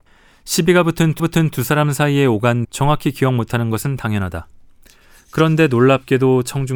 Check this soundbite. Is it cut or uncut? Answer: cut